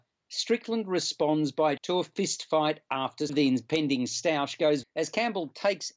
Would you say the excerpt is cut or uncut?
cut